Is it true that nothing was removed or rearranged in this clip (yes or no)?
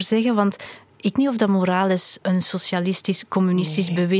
no